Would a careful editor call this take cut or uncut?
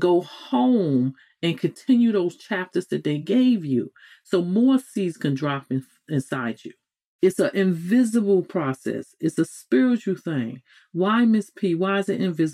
uncut